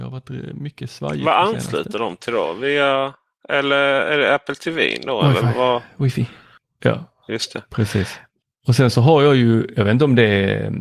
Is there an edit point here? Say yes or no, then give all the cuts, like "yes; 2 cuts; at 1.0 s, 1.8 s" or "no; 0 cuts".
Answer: no; 0 cuts